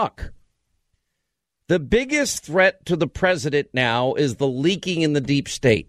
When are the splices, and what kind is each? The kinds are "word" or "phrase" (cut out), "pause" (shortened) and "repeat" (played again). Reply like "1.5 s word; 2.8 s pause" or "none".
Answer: none